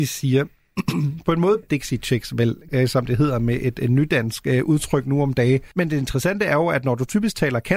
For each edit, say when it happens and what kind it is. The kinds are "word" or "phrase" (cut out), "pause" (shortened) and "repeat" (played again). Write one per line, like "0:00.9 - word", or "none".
0:01.6 - word
0:02.7 - word
0:05.7 - pause